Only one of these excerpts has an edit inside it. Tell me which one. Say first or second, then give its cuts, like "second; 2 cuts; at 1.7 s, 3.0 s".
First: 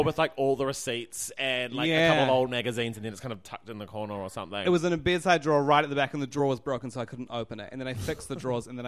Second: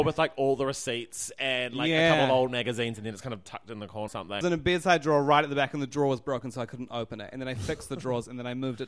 second; 2 cuts; at 4.1 s, 4.4 s